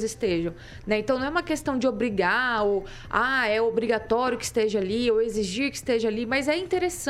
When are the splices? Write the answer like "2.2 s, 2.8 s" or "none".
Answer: none